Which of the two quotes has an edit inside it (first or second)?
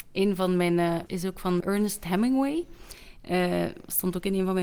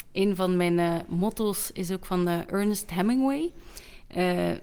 first